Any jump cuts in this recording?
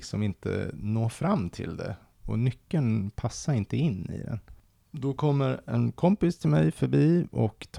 no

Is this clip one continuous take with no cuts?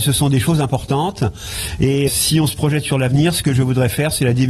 no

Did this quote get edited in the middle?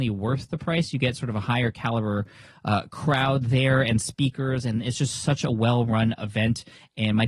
no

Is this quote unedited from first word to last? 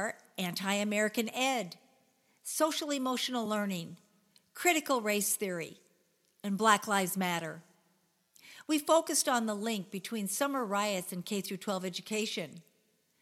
yes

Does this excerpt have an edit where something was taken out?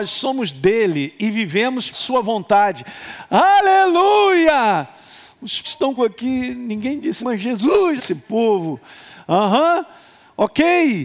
yes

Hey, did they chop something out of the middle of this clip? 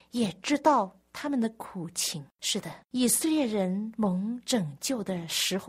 yes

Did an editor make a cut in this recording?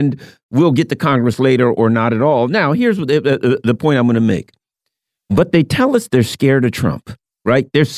no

